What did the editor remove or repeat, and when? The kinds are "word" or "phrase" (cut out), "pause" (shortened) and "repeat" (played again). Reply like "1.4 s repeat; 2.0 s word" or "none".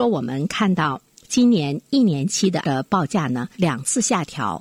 1.1 s pause; 2.6 s word; 3.5 s pause